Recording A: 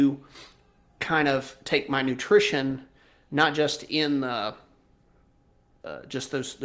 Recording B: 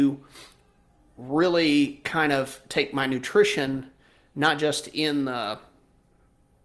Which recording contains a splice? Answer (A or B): A